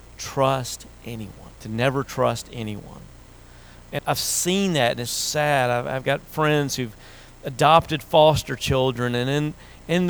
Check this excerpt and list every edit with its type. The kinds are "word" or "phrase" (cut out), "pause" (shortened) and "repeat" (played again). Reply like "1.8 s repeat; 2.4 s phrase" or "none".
1.6 s pause; 4.0 s word; 5.1 s word